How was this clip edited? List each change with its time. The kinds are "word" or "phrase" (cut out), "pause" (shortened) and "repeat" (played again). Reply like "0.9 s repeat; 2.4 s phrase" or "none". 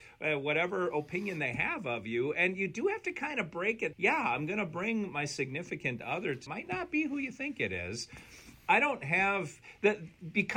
3.9 s phrase; 6.5 s phrase